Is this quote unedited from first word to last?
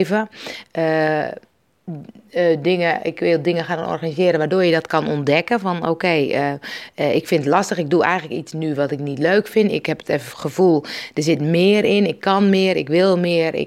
yes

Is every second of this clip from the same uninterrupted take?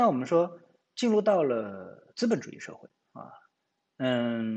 yes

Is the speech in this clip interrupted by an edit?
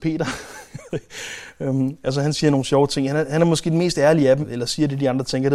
yes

